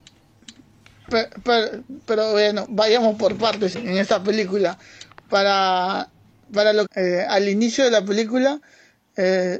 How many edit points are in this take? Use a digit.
2